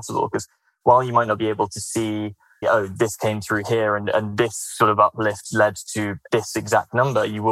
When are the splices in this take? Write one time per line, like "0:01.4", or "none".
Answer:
0:02.6